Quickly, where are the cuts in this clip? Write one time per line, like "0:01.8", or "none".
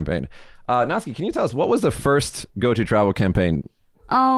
none